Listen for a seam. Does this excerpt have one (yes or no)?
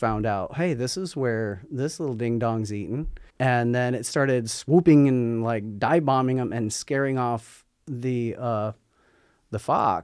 yes